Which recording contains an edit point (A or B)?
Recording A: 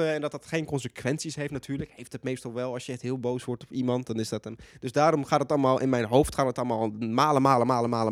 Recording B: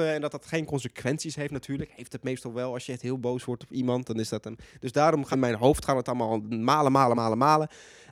B